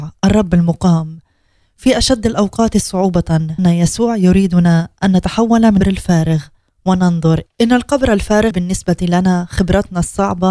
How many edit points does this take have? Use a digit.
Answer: 4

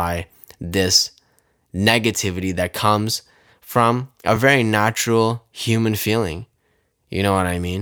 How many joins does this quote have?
0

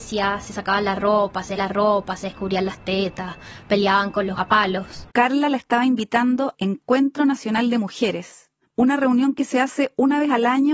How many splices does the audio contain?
5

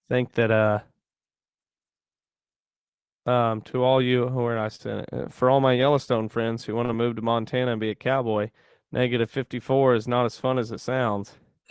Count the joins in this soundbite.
0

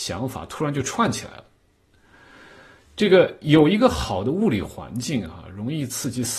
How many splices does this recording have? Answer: 0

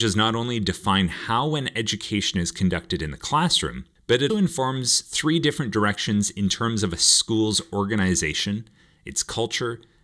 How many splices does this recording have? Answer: 1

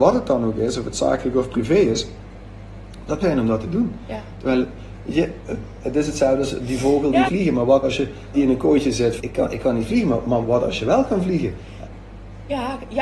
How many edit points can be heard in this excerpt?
6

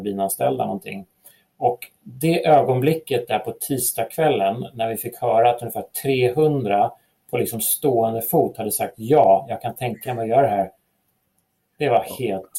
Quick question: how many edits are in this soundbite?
0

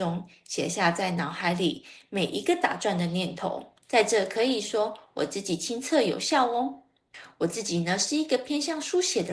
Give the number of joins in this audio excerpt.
1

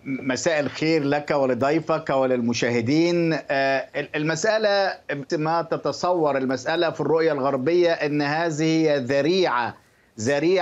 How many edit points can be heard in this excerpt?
1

